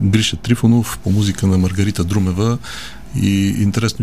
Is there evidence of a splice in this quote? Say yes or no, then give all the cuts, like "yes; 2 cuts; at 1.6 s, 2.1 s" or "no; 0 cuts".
no; 0 cuts